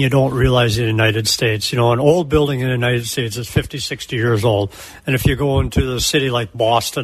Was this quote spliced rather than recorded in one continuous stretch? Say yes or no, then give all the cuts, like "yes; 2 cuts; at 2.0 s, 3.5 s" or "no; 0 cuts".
no; 0 cuts